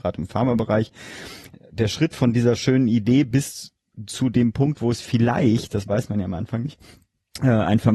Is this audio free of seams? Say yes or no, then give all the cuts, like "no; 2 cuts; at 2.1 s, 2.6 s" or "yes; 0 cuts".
yes; 0 cuts